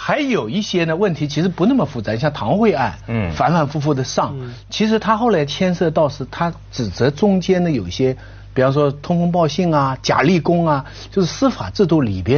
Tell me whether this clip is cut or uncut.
uncut